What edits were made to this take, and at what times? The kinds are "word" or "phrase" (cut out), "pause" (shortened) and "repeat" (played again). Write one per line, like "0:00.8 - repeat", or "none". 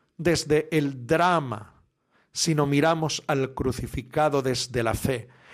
none